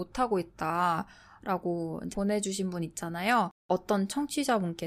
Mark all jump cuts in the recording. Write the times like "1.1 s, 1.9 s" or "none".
2.1 s, 3.6 s